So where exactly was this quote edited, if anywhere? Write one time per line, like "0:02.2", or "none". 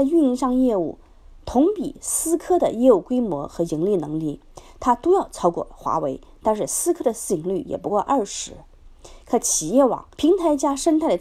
0:10.1